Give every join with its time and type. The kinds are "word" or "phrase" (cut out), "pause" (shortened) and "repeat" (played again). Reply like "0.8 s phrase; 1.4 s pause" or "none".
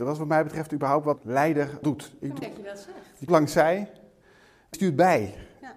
1.2 s word; 1.8 s word; 2.4 s word; 3.3 s word; 4.7 s word